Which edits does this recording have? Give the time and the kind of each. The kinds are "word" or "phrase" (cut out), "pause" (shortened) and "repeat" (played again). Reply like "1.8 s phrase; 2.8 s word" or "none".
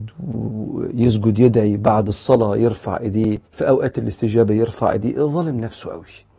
3.4 s pause